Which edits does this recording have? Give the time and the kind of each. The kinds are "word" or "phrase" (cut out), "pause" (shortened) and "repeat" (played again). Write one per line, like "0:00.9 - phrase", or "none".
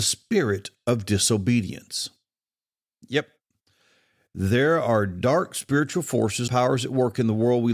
0:06.5 - word